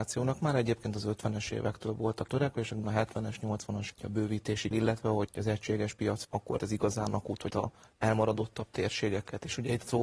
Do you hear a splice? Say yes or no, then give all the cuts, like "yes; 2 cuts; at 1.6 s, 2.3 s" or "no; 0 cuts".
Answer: yes; 8 cuts; at 2.3 s, 2.8 s, 3.9 s, 4.7 s, 5.3 s, 6.2 s, 6.6 s, 7.5 s